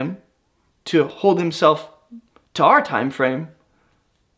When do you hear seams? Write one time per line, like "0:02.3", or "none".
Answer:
none